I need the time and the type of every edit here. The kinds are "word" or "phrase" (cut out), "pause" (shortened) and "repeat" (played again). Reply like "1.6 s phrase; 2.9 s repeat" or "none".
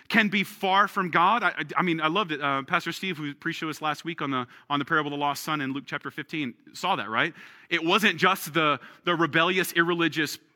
none